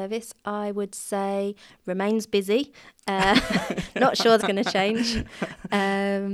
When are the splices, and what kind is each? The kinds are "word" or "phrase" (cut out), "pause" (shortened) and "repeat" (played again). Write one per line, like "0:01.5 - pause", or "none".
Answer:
0:04.4 - word